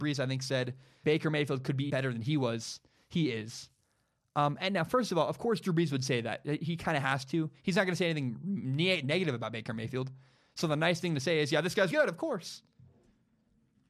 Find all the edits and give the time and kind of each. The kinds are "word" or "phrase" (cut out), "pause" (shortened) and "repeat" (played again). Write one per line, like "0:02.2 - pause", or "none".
0:01.0 - word
0:01.9 - word
0:11.9 - word